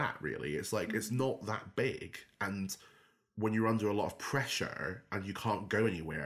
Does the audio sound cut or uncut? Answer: uncut